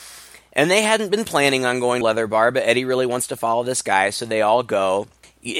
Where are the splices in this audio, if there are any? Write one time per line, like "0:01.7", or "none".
0:02.0